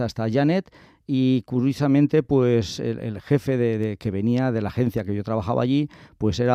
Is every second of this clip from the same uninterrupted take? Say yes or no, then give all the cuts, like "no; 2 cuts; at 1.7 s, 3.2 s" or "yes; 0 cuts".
yes; 0 cuts